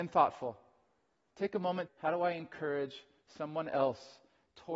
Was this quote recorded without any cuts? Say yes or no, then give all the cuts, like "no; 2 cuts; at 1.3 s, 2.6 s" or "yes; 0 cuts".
no; 1 cut; at 1.9 s